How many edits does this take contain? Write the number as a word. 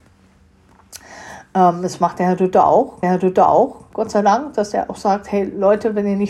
one